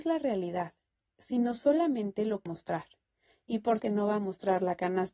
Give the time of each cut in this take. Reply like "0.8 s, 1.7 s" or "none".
2.5 s, 3.8 s